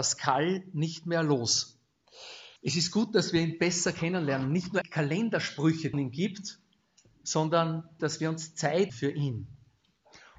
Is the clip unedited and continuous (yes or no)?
no